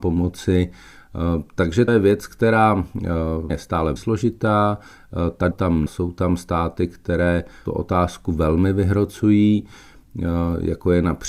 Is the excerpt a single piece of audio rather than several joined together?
no; 6 cuts; at 1.9 s, 3.5 s, 4.0 s, 5.5 s, 5.9 s, 7.7 s

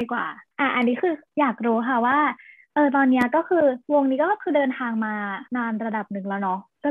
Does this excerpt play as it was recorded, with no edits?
no; 2 cuts; at 3.8 s, 5.5 s

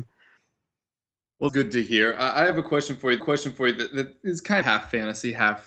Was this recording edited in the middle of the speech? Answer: yes; 3 cuts; at 1.5 s, 3.2 s, 4.6 s

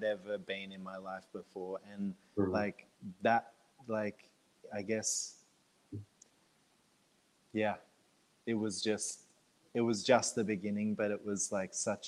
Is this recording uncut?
yes; 0 cuts

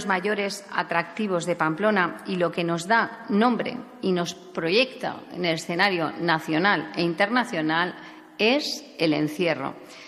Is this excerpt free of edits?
yes; 0 cuts

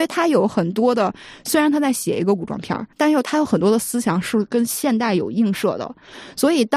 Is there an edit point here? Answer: yes; 1 cut; at 2.9 s

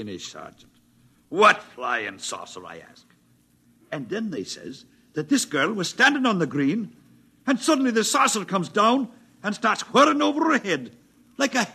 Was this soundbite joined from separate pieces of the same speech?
no; 0 cuts

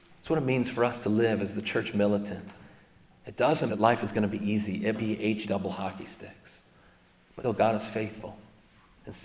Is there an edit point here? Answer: yes; 4 cuts; at 3.7 s, 4.9 s, 5.4 s, 7.4 s

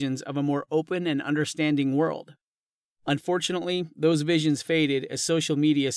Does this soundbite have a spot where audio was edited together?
no; 0 cuts

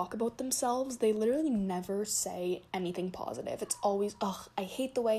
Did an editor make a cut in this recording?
no; 0 cuts

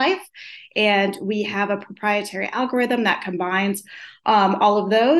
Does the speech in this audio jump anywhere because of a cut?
no; 0 cuts

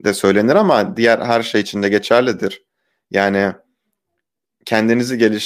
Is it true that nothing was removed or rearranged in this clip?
yes; 0 cuts

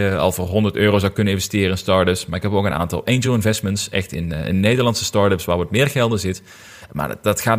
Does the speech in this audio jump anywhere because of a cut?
no; 0 cuts

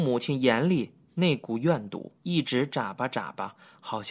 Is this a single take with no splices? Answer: no; 1 cut; at 2.2 s

